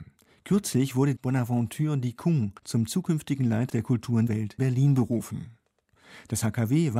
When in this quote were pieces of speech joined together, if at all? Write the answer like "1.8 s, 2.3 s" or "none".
1.2 s, 2.6 s, 3.7 s, 4.3 s, 4.6 s